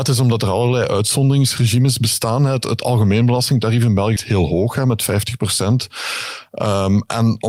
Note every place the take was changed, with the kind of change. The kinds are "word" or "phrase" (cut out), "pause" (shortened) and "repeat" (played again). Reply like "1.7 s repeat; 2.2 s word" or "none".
4.2 s word